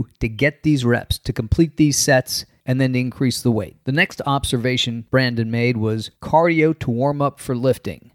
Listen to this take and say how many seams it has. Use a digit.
2